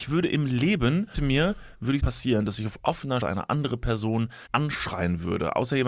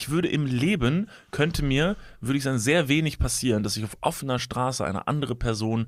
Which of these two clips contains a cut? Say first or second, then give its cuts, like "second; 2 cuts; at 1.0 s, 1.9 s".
first; 4 cuts; at 1.1 s, 2.0 s, 3.2 s, 4.5 s